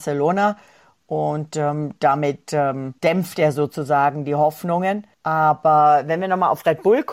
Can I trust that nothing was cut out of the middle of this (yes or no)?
no